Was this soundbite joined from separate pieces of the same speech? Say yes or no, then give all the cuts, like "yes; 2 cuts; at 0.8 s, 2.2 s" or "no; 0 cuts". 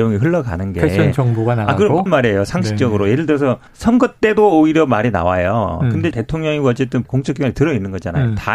yes; 4 cuts; at 2.1 s, 3.7 s, 6.1 s, 7.0 s